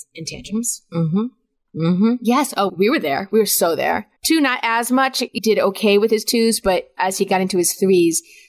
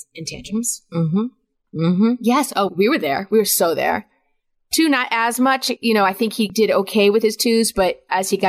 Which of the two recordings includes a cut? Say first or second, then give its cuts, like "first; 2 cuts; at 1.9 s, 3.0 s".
first; 2 cuts; at 4.2 s, 5.4 s